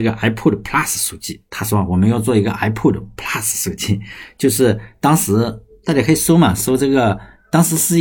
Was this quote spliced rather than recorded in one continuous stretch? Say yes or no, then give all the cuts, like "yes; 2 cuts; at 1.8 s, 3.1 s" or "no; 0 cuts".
no; 0 cuts